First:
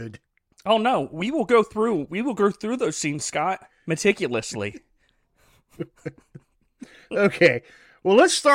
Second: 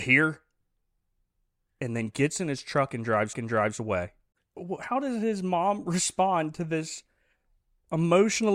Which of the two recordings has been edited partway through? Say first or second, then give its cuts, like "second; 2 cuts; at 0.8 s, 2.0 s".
second; 1 cut; at 3.3 s